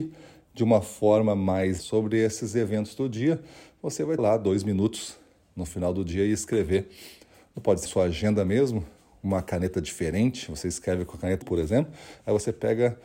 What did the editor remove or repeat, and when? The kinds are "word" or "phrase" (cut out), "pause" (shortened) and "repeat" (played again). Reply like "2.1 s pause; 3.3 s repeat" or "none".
1.8 s word; 4.2 s word; 7.9 s word; 11.4 s word